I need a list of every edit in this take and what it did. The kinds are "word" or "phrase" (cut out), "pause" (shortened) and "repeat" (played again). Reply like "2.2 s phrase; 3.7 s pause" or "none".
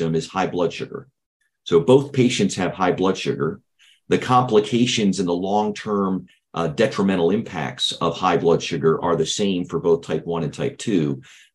none